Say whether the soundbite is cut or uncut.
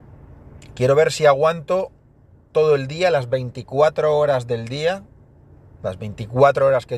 uncut